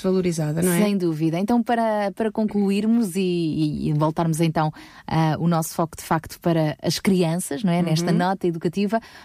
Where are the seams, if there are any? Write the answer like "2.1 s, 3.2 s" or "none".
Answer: none